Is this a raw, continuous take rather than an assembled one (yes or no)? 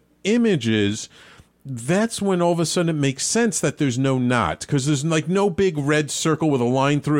yes